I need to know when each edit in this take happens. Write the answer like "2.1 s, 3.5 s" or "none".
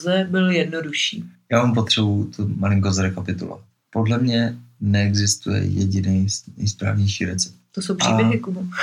none